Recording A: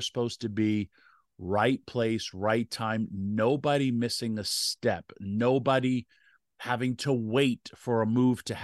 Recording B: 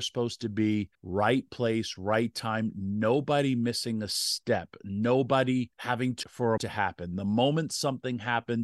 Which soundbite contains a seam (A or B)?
B